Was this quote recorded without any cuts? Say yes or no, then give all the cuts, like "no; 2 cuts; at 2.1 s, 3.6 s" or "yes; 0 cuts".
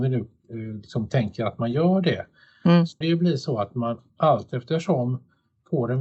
no; 1 cut; at 3.0 s